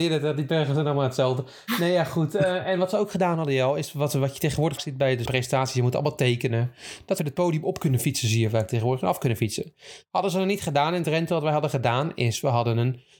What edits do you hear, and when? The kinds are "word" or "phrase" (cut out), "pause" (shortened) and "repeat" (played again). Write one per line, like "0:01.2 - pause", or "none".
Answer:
0:04.8 - word
0:05.3 - word
0:07.2 - word